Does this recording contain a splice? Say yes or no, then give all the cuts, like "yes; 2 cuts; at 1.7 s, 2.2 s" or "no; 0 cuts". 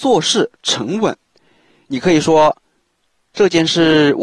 no; 0 cuts